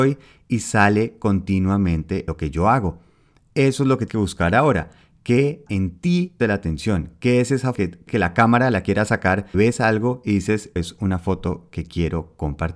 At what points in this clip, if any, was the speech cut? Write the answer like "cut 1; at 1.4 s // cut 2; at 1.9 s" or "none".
cut 1; at 2.3 s // cut 2; at 4.1 s // cut 3; at 5.7 s // cut 4; at 6.4 s // cut 5; at 7.7 s // cut 6; at 8.1 s // cut 7; at 9.5 s // cut 8; at 10.8 s